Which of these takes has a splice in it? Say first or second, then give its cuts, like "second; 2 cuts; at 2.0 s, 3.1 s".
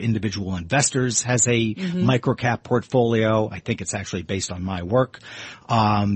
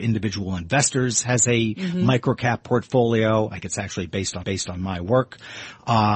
second; 2 cuts; at 3.6 s, 4.4 s